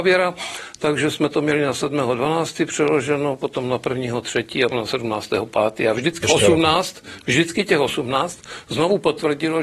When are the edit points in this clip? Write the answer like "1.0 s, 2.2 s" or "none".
4.7 s, 6.2 s